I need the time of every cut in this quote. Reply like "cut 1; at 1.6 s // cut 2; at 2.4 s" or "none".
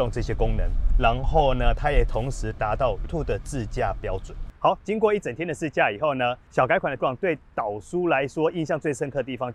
cut 1; at 3.1 s // cut 2; at 7.0 s

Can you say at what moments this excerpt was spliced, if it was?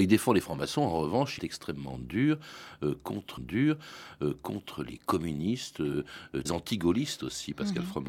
cut 1; at 1.4 s // cut 2; at 3.4 s // cut 3; at 6.5 s

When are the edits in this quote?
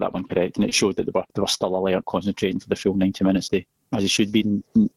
cut 1; at 1.3 s // cut 2; at 2.0 s // cut 3; at 3.5 s

